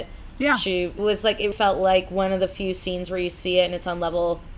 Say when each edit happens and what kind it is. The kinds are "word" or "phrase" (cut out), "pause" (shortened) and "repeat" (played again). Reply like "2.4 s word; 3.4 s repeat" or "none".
1.0 s word; 1.5 s word